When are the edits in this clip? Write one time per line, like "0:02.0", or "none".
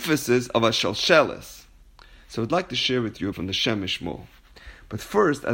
0:03.3